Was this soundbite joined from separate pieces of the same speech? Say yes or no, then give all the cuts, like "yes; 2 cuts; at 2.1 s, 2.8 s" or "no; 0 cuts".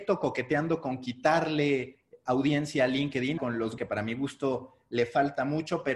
yes; 2 cuts; at 3.4 s, 3.8 s